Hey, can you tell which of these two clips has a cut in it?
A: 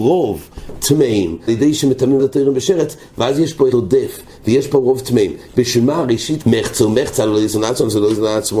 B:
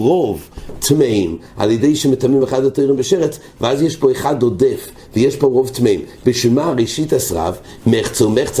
A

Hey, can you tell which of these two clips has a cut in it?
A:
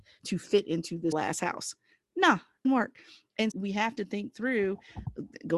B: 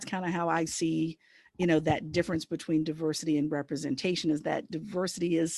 A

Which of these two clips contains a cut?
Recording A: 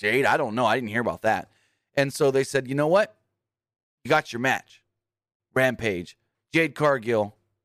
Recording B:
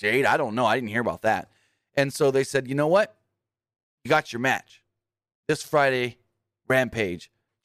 A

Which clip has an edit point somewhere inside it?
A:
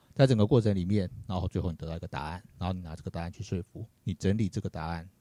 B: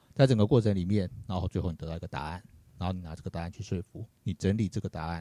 A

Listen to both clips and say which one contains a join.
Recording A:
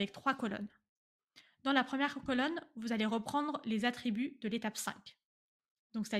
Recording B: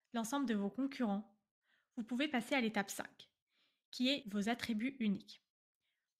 B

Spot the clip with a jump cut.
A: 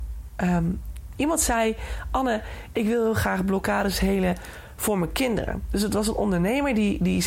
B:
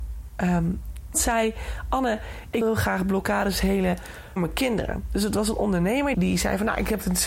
B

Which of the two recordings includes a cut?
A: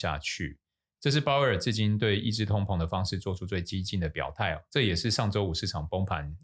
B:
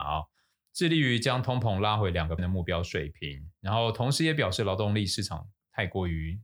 B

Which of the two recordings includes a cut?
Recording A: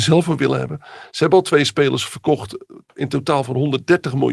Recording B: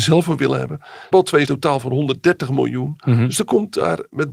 B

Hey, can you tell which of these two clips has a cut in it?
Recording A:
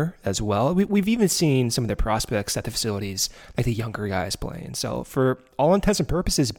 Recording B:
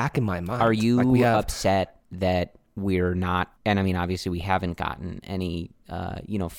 B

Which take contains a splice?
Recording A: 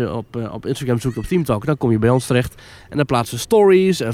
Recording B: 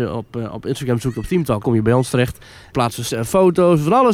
B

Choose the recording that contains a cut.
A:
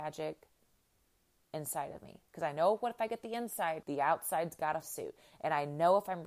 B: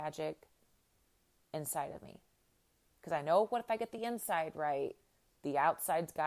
A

